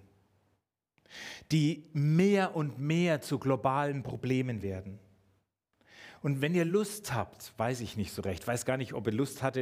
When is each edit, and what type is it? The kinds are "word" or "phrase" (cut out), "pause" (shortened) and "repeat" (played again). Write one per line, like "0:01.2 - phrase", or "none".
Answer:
none